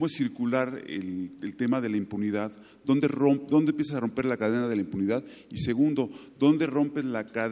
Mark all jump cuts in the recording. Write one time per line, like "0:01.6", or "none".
none